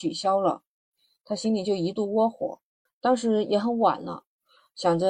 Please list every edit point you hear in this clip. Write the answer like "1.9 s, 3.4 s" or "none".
2.9 s